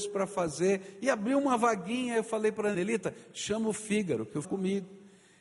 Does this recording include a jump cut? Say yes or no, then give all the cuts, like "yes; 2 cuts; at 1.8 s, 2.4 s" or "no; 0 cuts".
yes; 2 cuts; at 2.7 s, 4.4 s